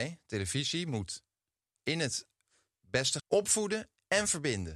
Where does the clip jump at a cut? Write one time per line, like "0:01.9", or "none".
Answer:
0:03.2